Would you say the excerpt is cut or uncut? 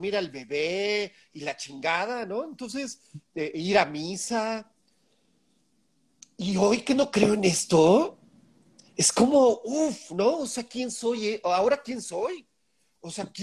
uncut